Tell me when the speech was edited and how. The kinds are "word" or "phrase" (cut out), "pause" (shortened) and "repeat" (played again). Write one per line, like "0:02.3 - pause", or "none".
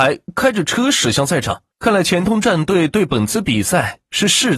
0:01.7 - pause